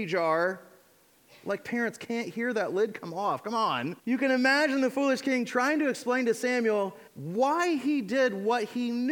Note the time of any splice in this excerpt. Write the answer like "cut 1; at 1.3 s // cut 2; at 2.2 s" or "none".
cut 1; at 4.0 s // cut 2; at 7.1 s